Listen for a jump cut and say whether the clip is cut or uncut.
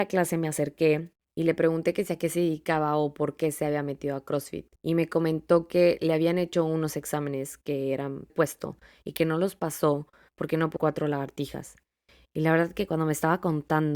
cut